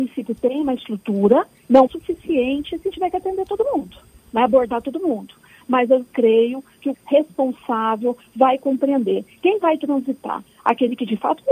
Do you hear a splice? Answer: yes; 2 cuts; at 1.9 s, 6.9 s

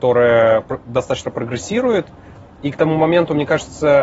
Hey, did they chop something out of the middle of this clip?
yes; 1 cut; at 1.2 s

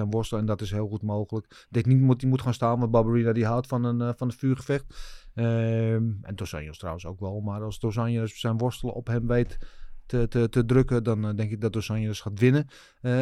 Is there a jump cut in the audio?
no; 0 cuts

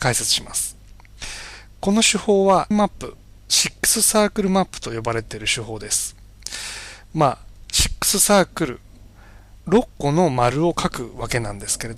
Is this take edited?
yes; 3 cuts; at 2.7 s, 3.2 s, 9.6 s

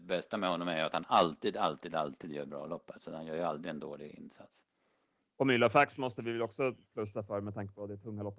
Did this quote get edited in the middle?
no; 0 cuts

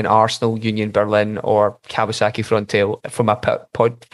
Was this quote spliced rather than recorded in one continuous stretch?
no; 0 cuts

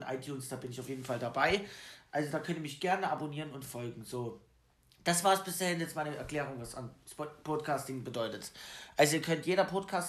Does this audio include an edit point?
no; 0 cuts

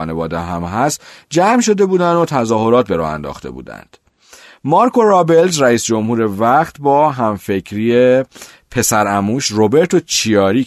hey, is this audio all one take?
yes; 0 cuts

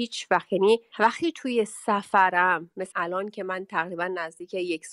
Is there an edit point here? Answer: yes; 1 cut; at 2.9 s

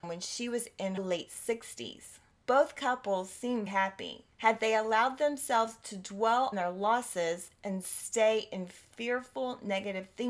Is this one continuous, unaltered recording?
no; 3 cuts; at 1.0 s, 3.7 s, 6.5 s

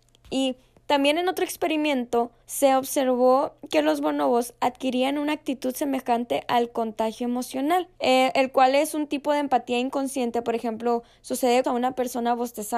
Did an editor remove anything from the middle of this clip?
yes; 3 cuts; at 2.4 s, 7.9 s, 11.6 s

